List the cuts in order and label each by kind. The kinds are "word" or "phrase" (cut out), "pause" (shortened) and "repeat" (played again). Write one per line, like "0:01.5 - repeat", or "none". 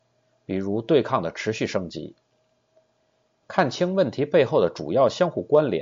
none

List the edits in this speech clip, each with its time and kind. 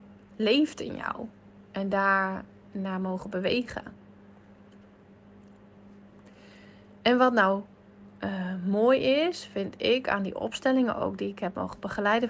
none

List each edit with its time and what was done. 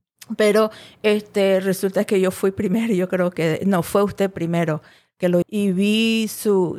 0:03.6 - word
0:05.4 - word

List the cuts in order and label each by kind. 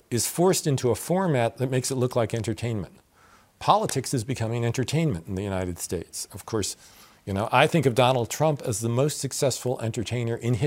none

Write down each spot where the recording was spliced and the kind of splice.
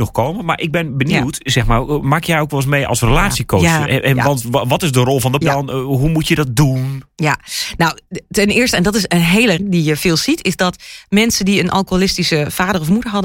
0:04.4 - word
0:05.4 - word
0:09.6 - word

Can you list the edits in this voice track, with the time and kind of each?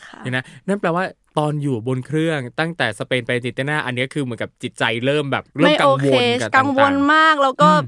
0:05.5 - pause

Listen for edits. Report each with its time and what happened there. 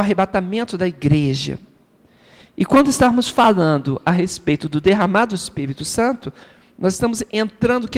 none

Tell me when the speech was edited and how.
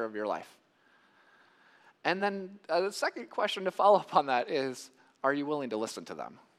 none

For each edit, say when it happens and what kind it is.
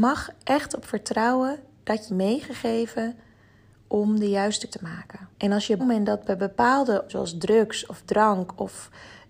0:02.1 - phrase
0:04.7 - word
0:05.3 - pause
0:05.8 - word
0:07.1 - word

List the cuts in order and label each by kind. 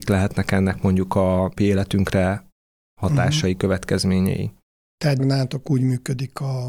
0:01.6 - word
0:05.2 - word

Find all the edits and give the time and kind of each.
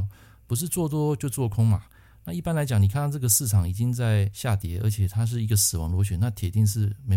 none

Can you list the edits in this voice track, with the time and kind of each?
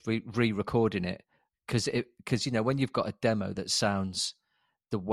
none

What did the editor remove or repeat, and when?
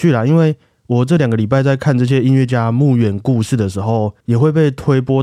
0:04.2 - pause

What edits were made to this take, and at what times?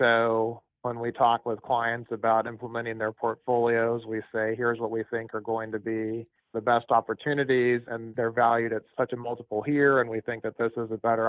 0:06.4 - pause

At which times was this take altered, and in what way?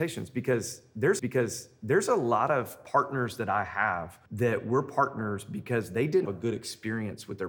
0:01.2 - repeat
0:04.3 - pause
0:06.2 - word

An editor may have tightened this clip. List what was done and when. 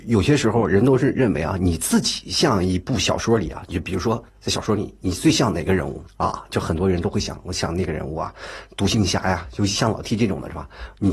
0:04.3 - pause
0:06.1 - pause

